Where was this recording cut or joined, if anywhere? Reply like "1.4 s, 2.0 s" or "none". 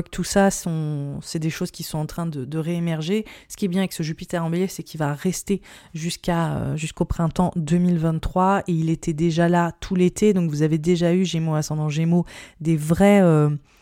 none